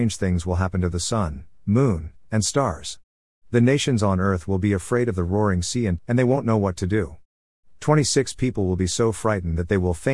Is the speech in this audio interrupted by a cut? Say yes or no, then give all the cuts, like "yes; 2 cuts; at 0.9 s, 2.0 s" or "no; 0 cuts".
yes; 1 cut; at 6.0 s